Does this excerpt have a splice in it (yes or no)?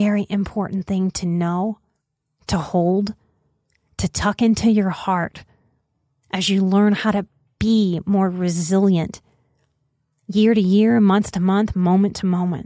no